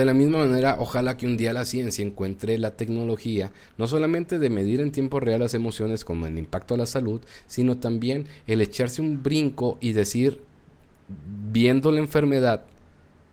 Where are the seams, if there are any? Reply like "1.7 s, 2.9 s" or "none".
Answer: none